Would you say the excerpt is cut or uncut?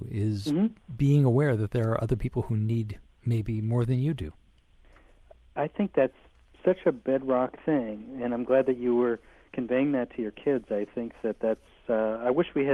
uncut